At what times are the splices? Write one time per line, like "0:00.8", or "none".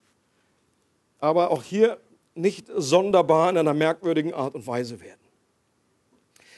none